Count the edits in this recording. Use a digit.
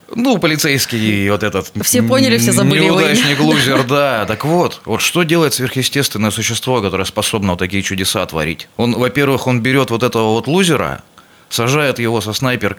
1